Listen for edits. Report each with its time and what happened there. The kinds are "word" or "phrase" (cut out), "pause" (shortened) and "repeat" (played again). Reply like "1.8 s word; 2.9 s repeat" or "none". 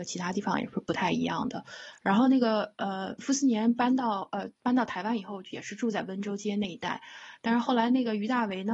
4.5 s pause